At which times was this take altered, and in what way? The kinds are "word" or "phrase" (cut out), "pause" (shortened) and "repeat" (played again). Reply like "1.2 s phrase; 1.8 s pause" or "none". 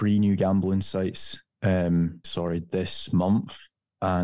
2.2 s phrase